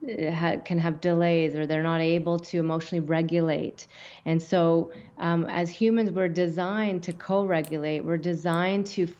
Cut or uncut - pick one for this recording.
uncut